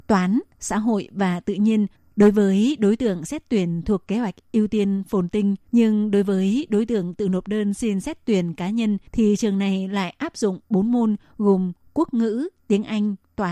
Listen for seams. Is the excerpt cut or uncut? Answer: cut